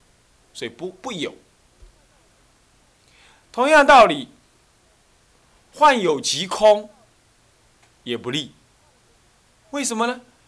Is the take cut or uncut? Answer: uncut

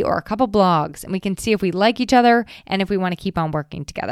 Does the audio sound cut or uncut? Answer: uncut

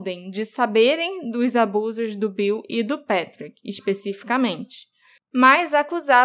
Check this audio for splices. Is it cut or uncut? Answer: uncut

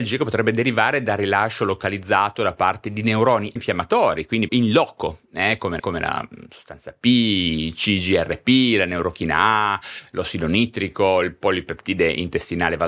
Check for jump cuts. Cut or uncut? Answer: cut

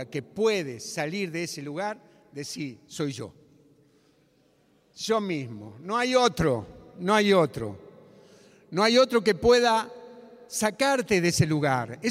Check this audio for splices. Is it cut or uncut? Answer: uncut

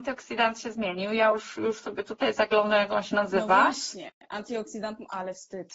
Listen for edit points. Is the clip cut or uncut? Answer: uncut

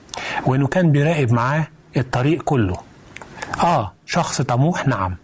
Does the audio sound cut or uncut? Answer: uncut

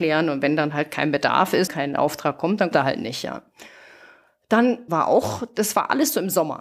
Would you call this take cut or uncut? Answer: cut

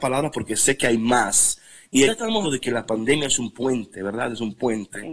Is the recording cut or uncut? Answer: cut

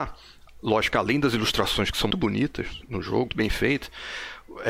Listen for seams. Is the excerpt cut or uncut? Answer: cut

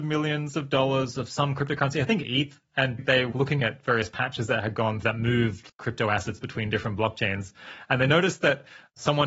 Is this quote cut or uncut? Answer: cut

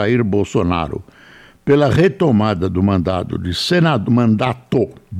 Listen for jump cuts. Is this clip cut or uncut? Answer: uncut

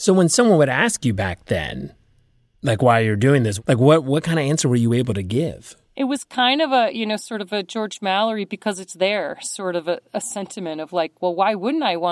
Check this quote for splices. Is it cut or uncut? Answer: uncut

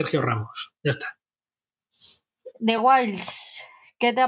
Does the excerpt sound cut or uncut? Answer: uncut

